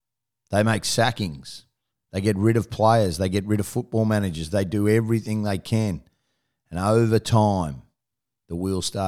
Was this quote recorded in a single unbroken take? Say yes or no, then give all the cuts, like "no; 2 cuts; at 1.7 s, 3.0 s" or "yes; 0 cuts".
yes; 0 cuts